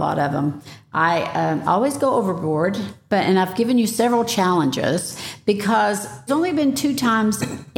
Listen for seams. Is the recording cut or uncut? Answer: cut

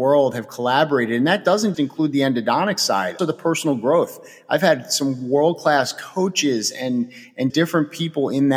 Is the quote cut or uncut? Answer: cut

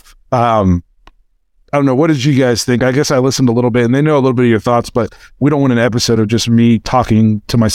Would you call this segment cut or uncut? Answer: uncut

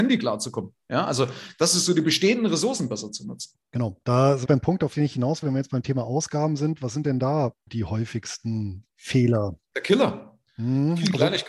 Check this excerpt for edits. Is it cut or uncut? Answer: cut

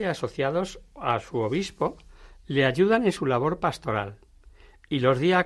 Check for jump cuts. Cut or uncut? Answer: uncut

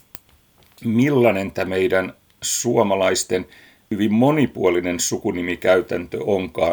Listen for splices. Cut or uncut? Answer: uncut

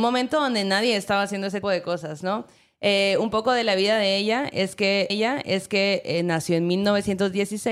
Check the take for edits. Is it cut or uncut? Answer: cut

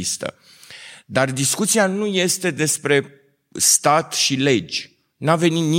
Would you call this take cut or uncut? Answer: uncut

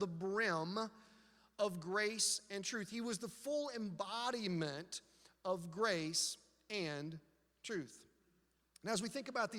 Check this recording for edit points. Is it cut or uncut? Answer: uncut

